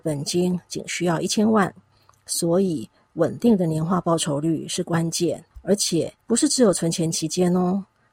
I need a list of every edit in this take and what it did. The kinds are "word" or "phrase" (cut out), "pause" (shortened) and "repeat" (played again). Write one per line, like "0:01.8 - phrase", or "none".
0:05.5 - pause
0:06.2 - pause